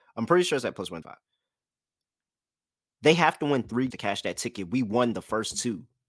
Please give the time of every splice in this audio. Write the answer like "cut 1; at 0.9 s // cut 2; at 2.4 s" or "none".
cut 1; at 1.0 s // cut 2; at 3.9 s